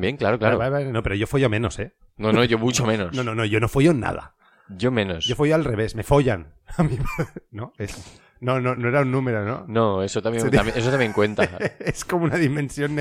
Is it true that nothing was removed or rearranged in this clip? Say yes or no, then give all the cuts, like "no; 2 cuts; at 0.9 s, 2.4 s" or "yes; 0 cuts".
yes; 0 cuts